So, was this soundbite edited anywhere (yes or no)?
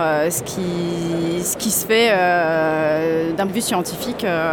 yes